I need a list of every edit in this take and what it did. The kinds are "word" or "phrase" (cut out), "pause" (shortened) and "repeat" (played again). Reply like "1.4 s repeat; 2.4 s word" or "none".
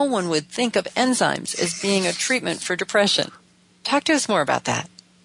none